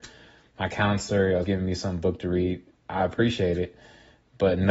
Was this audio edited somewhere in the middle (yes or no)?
yes